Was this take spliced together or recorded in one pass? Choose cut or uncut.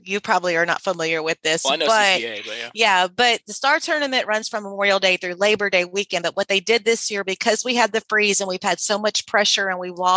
uncut